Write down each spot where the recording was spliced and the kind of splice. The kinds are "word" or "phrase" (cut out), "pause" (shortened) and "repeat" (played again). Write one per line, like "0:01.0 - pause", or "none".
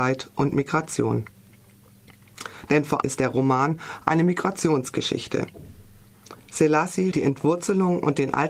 0:03.0 - word
0:07.1 - word